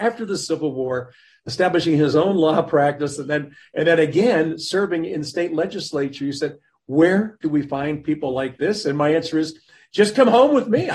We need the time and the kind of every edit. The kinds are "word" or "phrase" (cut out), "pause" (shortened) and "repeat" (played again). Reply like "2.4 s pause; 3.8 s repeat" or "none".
none

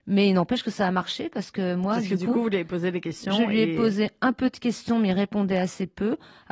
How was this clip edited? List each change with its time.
none

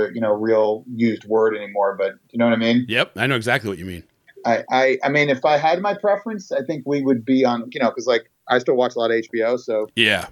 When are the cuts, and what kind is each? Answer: none

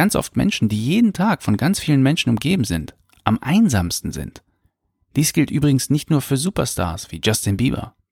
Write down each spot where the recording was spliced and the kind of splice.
4.6 s pause

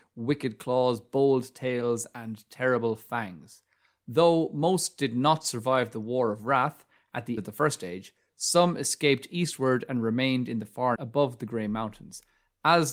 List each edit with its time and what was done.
7.4 s word; 11.0 s word

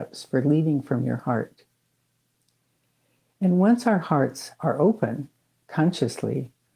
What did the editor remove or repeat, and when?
none

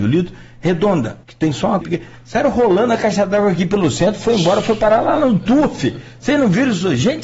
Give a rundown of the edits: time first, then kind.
1.2 s pause; 1.8 s word

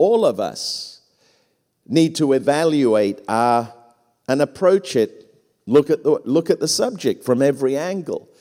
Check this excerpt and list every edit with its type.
none

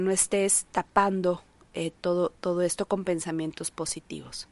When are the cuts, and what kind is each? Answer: none

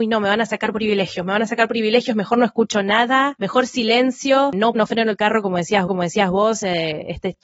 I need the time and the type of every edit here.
4.7 s word; 5.9 s repeat

